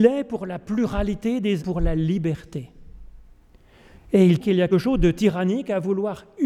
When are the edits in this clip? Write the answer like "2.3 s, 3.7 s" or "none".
1.6 s, 4.4 s, 4.7 s